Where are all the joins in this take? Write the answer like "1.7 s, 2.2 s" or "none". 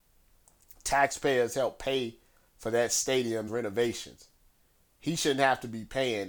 3.5 s